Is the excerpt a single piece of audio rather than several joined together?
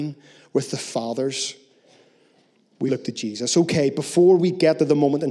no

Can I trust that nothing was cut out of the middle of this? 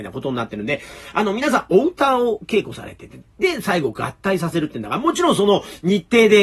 yes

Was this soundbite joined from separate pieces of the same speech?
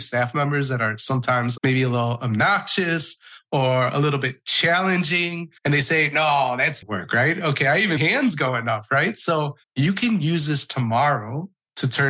yes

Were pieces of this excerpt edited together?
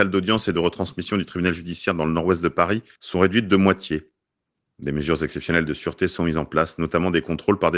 no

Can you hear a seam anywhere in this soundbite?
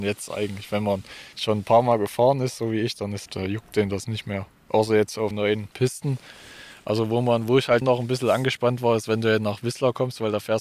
yes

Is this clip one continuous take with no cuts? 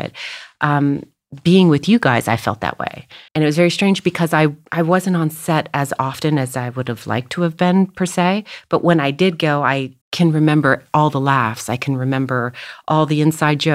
no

